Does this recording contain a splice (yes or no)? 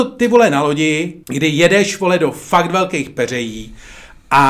yes